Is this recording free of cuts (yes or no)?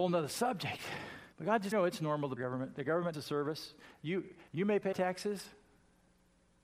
no